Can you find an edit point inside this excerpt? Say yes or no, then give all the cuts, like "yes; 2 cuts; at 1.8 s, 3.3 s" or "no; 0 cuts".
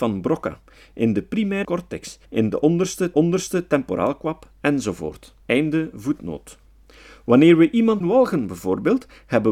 yes; 5 cuts; at 1.6 s, 2.2 s, 3.1 s, 5.4 s, 8.0 s